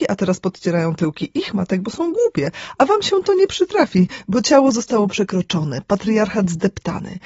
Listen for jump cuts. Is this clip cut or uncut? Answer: uncut